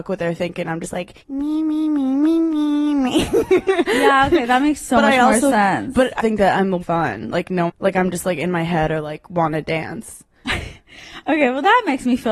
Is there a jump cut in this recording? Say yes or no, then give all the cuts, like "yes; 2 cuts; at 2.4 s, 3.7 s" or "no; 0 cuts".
yes; 4 cuts; at 1.2 s, 6.2 s, 6.8 s, 7.7 s